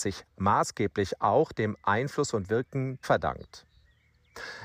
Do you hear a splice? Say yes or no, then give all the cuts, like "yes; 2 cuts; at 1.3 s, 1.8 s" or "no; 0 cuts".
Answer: yes; 1 cut; at 3.0 s